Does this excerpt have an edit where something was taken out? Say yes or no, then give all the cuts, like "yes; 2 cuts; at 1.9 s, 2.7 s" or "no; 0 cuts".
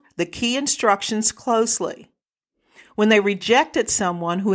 no; 0 cuts